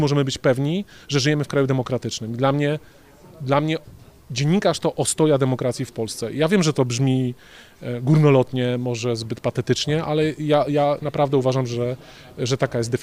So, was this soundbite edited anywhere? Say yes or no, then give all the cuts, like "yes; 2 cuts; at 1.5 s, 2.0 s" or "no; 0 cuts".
no; 0 cuts